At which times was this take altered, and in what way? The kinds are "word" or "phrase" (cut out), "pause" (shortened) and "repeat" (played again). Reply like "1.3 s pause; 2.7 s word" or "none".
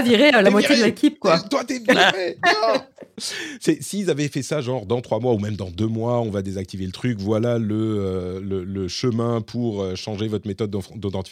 none